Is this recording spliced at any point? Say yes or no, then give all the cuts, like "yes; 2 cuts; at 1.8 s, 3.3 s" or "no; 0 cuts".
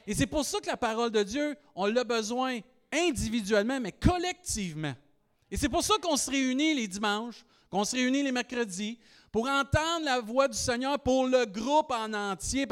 no; 0 cuts